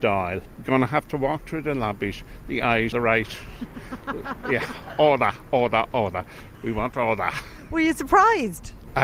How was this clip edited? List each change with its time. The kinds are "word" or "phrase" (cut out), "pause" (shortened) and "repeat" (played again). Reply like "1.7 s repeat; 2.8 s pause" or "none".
2.9 s word